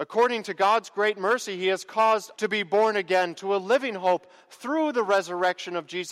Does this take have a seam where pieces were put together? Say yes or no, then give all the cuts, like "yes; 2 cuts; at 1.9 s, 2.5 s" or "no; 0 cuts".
yes; 1 cut; at 2.3 s